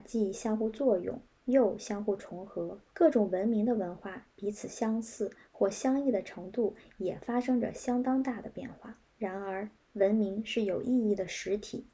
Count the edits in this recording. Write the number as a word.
two